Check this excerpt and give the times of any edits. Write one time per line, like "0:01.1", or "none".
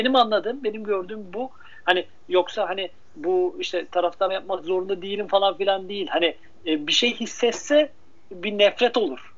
0:04.3